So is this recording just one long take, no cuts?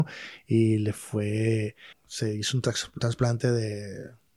no; 2 cuts; at 1.9 s, 3.0 s

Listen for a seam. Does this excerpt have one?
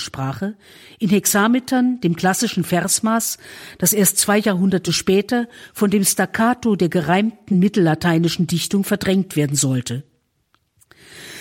no; 0 cuts

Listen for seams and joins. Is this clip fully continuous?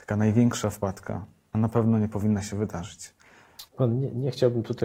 no; 2 cuts; at 1.5 s, 3.7 s

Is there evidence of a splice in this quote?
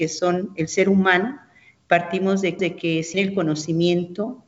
yes; 2 cuts; at 2.6 s, 3.1 s

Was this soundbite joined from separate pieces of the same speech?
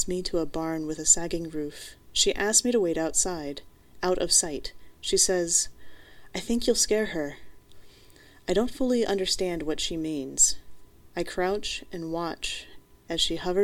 no; 0 cuts

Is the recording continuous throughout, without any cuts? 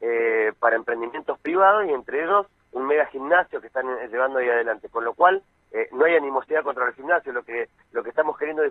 yes; 0 cuts

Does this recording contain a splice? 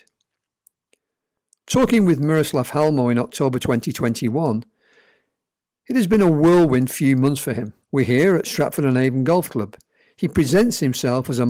yes; 1 cut; at 7.8 s

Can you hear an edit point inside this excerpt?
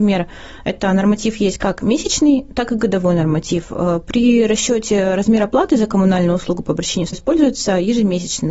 yes; 1 cut; at 7.1 s

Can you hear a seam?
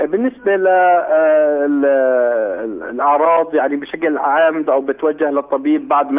yes; 1 cut; at 4.6 s

